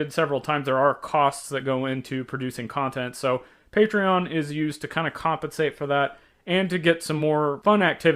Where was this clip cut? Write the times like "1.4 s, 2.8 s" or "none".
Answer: none